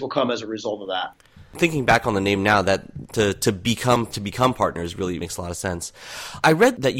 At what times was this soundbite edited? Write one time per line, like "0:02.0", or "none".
0:04.1
0:05.2